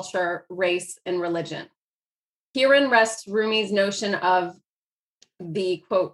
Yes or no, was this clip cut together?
no